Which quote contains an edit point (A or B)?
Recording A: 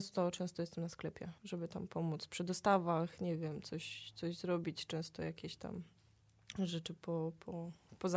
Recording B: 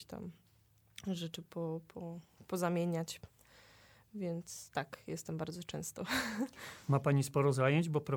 A